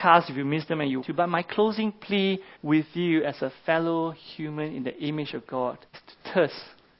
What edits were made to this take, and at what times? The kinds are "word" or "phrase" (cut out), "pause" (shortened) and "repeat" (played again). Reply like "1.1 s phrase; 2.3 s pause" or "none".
1.0 s word; 2.6 s pause; 5.9 s pause